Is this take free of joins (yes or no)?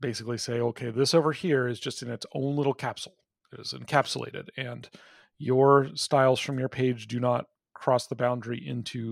yes